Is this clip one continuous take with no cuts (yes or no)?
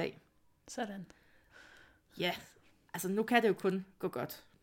yes